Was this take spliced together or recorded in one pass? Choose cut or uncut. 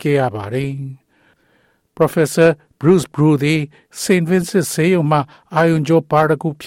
uncut